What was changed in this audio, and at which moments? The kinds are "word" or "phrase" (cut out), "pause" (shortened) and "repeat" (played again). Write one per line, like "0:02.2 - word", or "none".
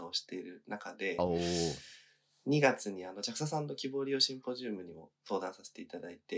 none